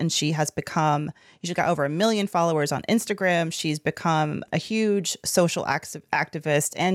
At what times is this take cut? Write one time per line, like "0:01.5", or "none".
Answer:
0:04.5